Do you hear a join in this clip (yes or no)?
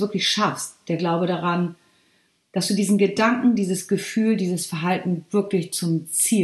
no